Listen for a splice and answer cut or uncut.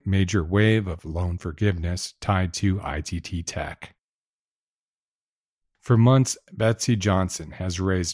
uncut